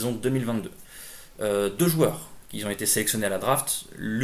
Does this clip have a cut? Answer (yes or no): no